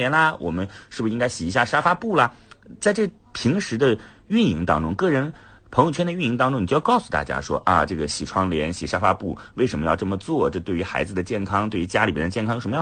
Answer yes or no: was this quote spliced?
no